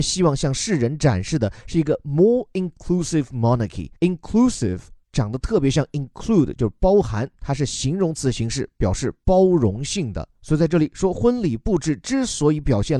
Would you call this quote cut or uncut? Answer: cut